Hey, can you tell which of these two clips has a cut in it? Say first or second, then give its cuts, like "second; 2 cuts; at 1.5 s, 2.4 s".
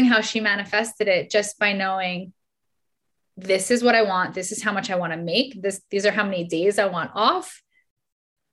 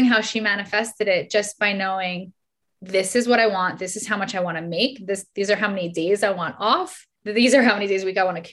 second; 2 cuts; at 2.6 s, 7.2 s